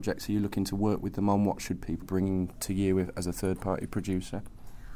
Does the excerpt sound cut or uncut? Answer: cut